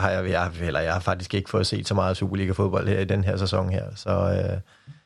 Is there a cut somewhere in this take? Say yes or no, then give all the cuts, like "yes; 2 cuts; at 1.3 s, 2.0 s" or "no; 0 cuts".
no; 0 cuts